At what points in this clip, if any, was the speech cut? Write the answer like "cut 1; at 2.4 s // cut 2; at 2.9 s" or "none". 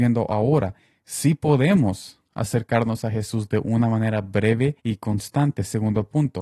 cut 1; at 4.8 s